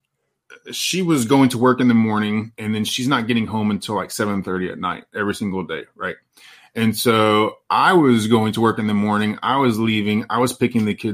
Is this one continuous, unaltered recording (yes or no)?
yes